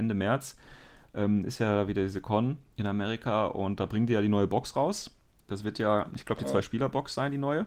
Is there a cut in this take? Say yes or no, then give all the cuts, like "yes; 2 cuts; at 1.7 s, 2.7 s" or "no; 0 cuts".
no; 0 cuts